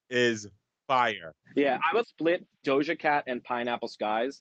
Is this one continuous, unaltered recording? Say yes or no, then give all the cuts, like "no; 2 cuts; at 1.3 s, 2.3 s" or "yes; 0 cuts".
no; 2 cuts; at 1.4 s, 2.0 s